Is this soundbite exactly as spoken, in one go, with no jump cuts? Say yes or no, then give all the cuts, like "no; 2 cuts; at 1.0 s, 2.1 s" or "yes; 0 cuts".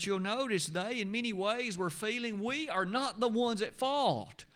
yes; 0 cuts